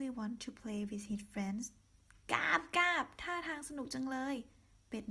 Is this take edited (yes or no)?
no